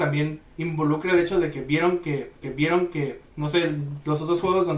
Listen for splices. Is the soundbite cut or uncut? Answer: cut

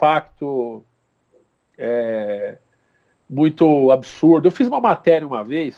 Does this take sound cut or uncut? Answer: uncut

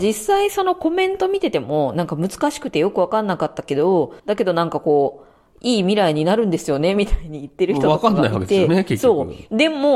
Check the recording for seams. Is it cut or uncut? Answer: cut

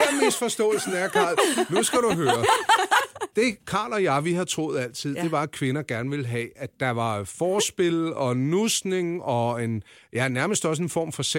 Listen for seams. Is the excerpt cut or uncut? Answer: uncut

